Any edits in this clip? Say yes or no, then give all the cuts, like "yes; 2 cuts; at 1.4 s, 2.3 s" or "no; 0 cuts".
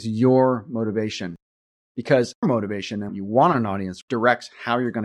yes; 3 cuts; at 2.4 s, 3.1 s, 4.0 s